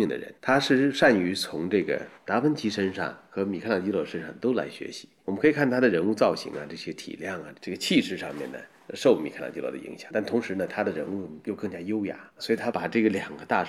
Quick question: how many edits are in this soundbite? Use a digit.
1